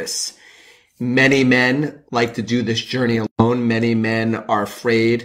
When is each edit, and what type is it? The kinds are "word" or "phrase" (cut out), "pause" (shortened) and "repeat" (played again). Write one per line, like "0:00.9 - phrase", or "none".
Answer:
0:02.1 - pause